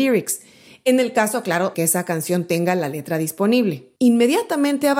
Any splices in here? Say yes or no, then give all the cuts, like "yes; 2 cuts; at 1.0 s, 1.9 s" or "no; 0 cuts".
yes; 1 cut; at 1.7 s